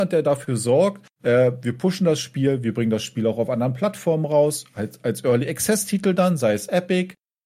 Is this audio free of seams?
no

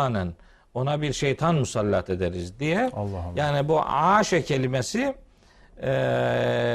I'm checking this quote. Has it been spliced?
no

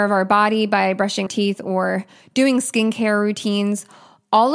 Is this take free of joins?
no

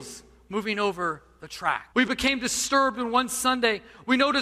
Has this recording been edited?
yes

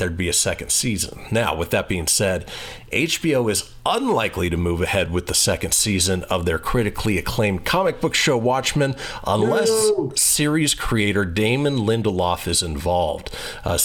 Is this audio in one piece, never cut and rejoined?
yes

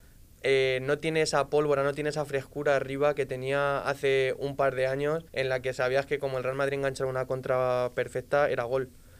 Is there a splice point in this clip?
yes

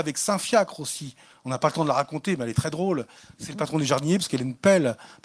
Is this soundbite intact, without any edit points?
yes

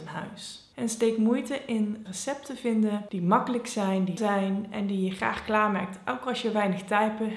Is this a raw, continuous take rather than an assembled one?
no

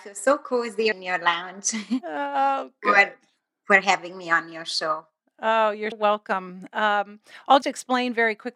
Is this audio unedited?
no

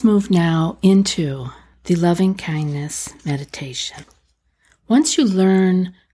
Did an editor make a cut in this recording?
no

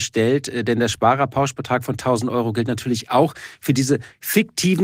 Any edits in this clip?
no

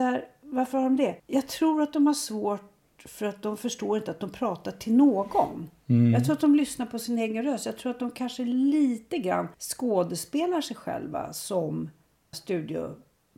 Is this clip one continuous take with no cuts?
no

